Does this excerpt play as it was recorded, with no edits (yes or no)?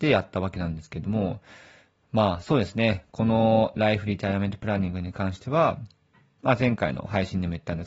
yes